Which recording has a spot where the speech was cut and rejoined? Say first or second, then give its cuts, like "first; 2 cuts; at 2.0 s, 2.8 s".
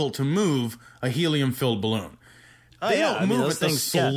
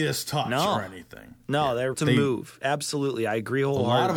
second; 1 cut; at 1.9 s